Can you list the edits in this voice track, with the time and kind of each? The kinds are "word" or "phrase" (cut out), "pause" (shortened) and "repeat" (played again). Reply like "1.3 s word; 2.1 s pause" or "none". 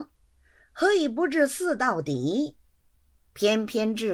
none